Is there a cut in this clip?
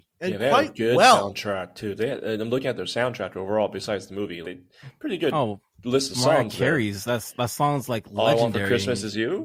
yes; 1 cut; at 4.4 s

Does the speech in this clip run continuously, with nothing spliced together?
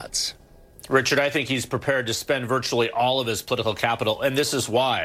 yes; 0 cuts

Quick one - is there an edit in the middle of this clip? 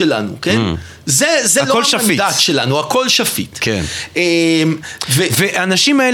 no; 0 cuts

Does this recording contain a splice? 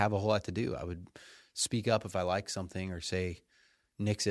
no; 0 cuts

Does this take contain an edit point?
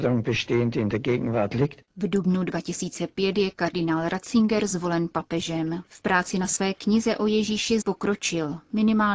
yes; 2 cuts; at 5.9 s, 7.8 s

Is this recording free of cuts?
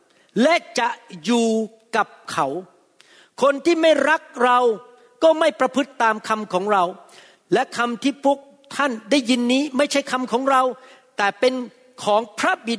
yes; 0 cuts

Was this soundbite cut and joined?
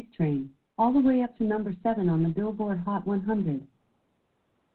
no; 0 cuts

